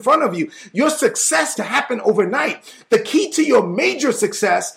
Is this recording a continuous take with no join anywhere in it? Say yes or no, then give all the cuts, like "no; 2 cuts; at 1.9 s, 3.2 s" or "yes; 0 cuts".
no; 1 cut; at 1.6 s